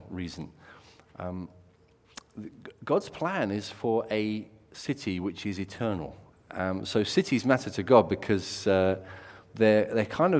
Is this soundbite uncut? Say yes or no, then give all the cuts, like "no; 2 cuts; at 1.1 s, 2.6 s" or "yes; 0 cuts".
no; 1 cut; at 6.3 s